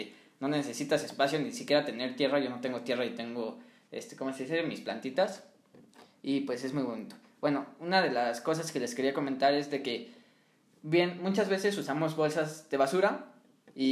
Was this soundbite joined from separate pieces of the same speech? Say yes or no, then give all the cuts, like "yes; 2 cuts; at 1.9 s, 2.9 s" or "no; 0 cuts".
no; 0 cuts